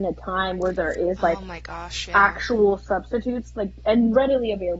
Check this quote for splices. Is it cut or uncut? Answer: uncut